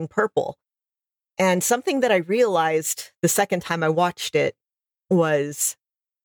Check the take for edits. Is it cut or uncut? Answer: uncut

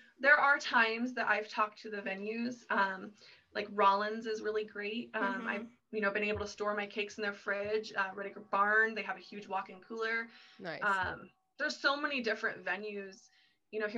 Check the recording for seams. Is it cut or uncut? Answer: uncut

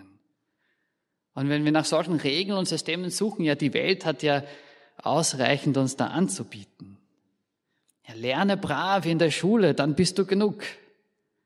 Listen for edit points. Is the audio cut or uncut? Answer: uncut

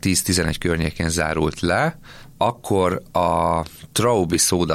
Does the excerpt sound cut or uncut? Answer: uncut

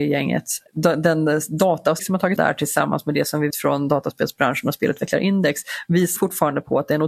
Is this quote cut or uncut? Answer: cut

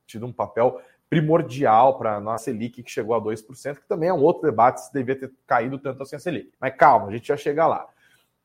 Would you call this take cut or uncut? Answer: cut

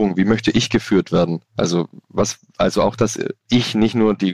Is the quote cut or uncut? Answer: uncut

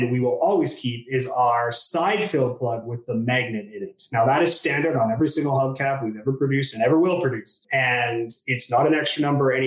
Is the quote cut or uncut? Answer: uncut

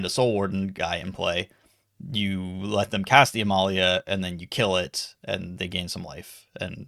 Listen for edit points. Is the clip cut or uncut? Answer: uncut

